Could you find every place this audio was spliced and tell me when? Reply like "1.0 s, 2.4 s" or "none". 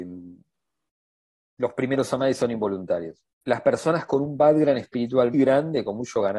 3.3 s, 5.3 s